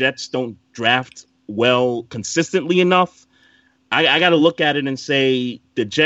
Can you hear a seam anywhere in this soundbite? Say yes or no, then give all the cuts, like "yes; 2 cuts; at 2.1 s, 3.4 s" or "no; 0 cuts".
no; 0 cuts